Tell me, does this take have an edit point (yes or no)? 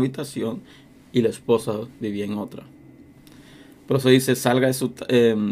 no